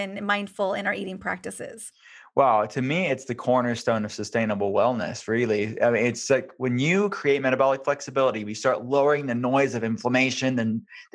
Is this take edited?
no; 0 cuts

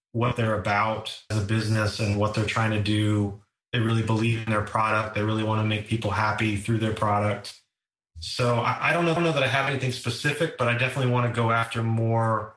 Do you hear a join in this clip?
yes; 2 cuts; at 1.3 s, 9.2 s

